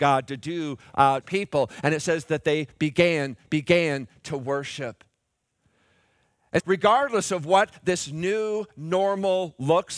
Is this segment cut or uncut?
cut